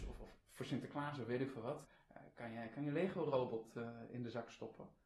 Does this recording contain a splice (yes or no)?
no